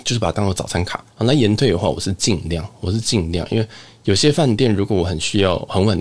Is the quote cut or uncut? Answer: cut